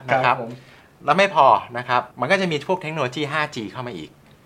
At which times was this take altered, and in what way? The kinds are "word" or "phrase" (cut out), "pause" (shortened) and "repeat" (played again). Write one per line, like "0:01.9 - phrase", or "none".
0:02.1 - pause